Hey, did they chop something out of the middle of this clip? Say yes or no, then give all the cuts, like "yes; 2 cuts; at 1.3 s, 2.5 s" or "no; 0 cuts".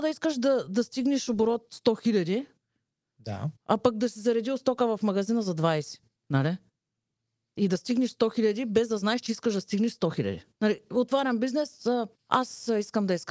yes; 4 cuts; at 3.6 s, 6.1 s, 10.5 s, 12.1 s